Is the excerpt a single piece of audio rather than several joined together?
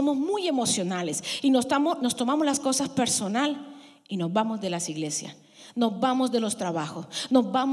yes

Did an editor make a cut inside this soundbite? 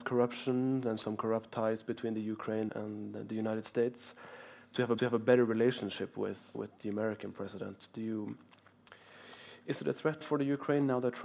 yes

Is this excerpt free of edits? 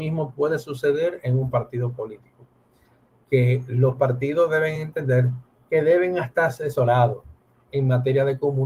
yes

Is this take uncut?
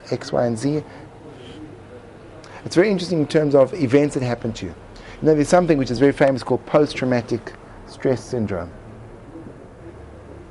yes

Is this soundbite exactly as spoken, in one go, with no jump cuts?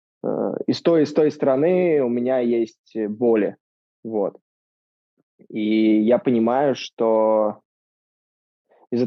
yes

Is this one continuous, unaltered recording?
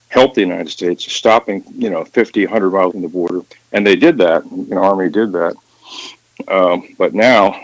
no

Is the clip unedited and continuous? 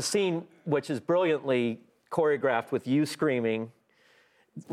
yes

